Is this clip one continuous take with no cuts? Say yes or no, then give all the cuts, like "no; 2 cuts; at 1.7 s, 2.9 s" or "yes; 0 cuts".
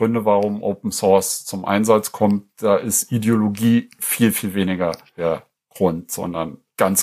yes; 0 cuts